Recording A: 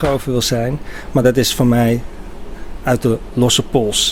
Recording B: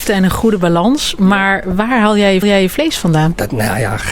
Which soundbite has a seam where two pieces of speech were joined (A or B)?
B